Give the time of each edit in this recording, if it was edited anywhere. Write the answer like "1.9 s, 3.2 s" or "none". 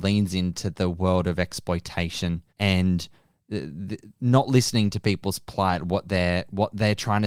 2.5 s